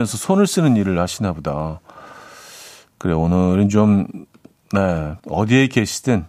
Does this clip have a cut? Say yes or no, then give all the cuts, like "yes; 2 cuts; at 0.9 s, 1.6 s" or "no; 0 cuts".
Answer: yes; 1 cut; at 5.2 s